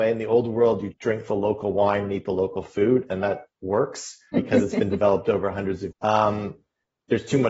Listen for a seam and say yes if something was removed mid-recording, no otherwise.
yes